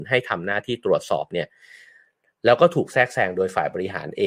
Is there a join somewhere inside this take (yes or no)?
no